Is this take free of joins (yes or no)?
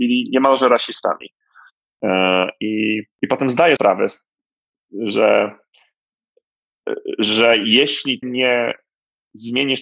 no